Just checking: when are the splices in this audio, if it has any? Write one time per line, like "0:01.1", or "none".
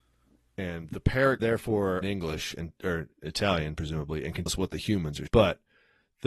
0:01.4
0:02.0
0:04.5
0:05.3